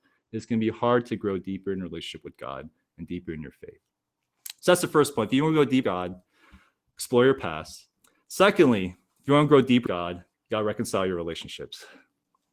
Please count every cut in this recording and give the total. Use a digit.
3